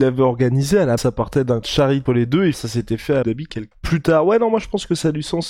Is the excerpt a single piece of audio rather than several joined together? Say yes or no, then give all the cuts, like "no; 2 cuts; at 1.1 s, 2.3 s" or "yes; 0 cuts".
no; 6 cuts; at 1.0 s, 1.6 s, 2.1 s, 2.5 s, 3.2 s, 3.7 s